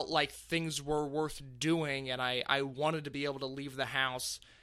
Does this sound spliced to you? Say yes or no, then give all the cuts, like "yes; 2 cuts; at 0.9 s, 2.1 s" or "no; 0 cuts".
no; 0 cuts